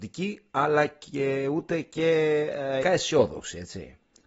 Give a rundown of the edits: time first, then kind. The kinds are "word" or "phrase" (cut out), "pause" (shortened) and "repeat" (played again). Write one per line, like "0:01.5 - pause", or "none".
0:02.8 - word